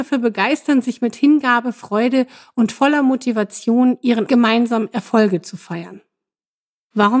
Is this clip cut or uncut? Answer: cut